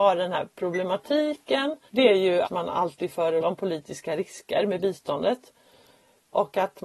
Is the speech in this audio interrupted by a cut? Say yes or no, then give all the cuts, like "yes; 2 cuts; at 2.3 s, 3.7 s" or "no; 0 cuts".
yes; 3 cuts; at 1.9 s, 2.4 s, 3.4 s